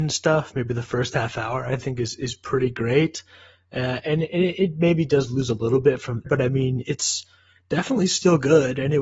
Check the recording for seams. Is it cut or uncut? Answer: cut